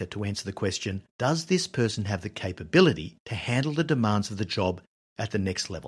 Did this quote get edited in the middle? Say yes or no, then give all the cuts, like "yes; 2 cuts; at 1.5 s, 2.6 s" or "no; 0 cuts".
yes; 2 cuts; at 1.1 s, 3.2 s